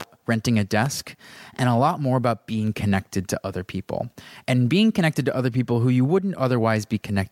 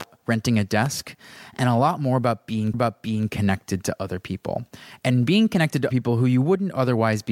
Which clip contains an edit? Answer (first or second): second